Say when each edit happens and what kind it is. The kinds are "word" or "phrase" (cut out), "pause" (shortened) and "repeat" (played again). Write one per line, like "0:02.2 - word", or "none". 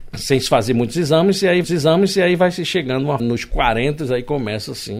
0:01.6 - repeat
0:03.2 - phrase